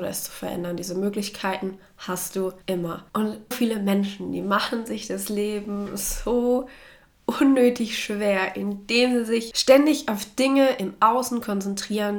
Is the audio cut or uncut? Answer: cut